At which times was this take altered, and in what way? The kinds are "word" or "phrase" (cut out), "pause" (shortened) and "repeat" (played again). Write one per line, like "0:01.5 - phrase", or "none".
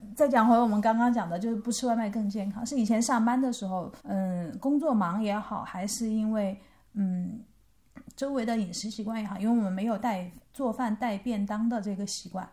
0:04.0 - pause
0:10.4 - pause